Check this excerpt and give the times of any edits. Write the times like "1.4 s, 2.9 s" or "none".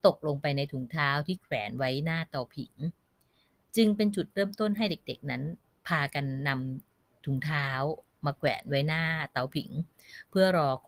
none